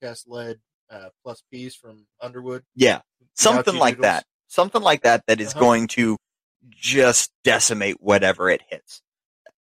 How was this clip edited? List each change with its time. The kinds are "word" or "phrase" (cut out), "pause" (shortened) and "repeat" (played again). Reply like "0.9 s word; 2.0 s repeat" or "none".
3.1 s pause; 7.4 s pause